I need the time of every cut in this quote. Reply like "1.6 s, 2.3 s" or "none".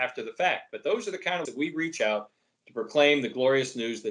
1.4 s